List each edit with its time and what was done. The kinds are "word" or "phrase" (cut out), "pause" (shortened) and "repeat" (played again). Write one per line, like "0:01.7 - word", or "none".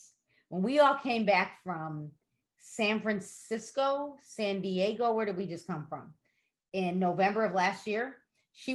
none